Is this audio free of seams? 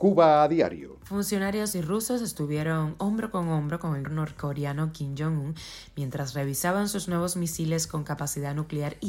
no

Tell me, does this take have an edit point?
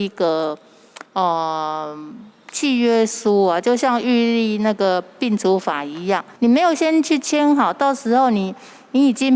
yes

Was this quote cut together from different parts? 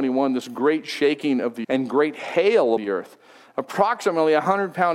yes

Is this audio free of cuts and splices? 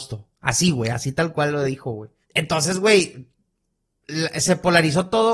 no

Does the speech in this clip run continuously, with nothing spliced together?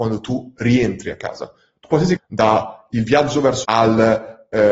no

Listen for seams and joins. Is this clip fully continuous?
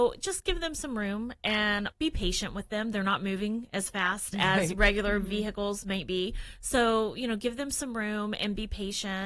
no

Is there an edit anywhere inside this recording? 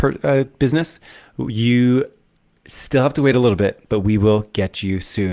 no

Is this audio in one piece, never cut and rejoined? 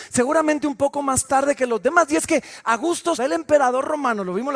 no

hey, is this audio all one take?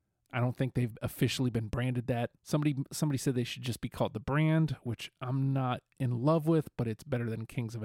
no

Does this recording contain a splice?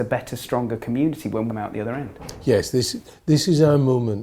yes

